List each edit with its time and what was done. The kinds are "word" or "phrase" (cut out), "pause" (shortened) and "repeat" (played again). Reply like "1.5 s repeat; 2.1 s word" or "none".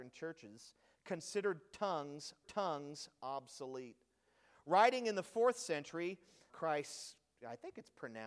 2.4 s repeat; 6.5 s word